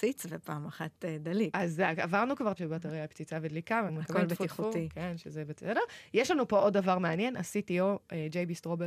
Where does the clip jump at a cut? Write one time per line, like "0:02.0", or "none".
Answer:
0:02.6
0:03.9